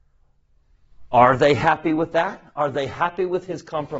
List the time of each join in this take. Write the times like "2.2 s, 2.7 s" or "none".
none